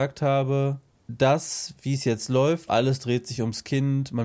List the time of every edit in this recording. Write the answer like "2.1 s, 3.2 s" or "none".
2.7 s